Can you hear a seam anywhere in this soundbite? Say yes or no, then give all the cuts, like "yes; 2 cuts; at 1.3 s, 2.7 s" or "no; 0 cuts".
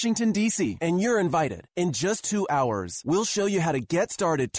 no; 0 cuts